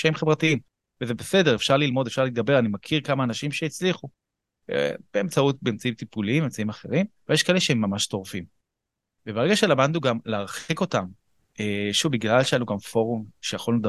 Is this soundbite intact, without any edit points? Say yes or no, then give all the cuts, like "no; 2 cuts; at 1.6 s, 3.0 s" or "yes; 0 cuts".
yes; 0 cuts